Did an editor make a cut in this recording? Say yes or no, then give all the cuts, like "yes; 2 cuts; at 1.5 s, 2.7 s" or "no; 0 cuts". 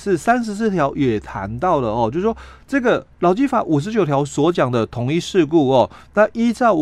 yes; 1 cut; at 3.1 s